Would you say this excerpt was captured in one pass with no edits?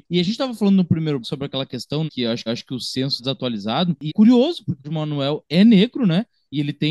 no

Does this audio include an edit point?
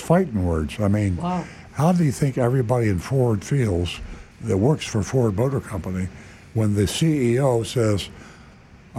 yes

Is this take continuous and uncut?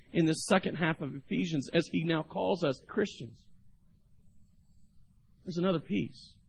no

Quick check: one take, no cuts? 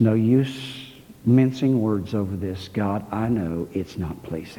yes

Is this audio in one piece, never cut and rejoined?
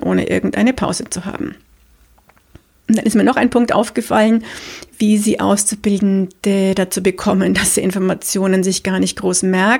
yes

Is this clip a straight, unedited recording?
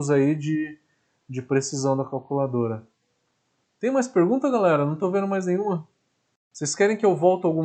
yes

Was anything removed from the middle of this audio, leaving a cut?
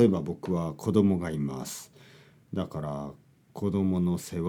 no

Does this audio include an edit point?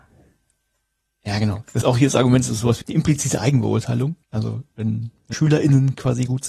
yes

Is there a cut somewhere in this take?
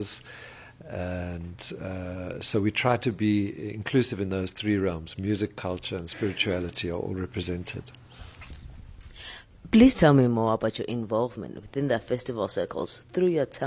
no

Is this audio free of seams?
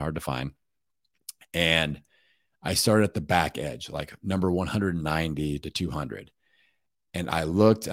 yes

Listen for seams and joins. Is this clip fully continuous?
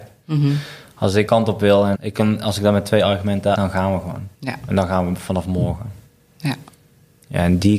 no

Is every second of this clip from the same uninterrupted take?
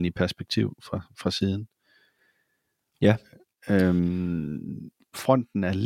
yes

